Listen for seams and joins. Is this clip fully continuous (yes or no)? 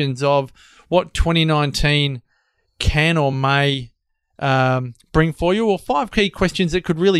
yes